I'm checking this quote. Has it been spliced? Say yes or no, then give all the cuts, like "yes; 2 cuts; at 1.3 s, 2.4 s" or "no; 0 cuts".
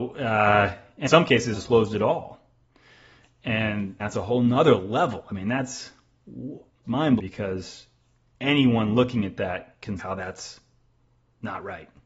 yes; 6 cuts; at 1.1 s, 1.5 s, 4.0 s, 6.8 s, 7.2 s, 10.0 s